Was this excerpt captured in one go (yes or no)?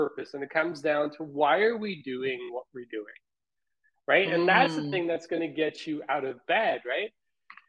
yes